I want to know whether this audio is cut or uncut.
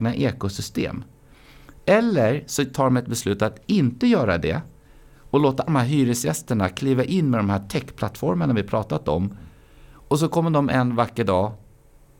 cut